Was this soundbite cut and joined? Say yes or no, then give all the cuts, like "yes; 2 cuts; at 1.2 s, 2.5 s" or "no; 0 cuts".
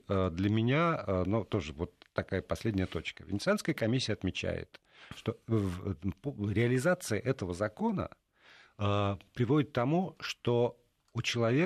no; 0 cuts